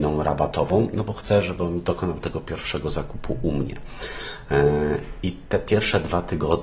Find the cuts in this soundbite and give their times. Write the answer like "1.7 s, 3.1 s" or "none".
none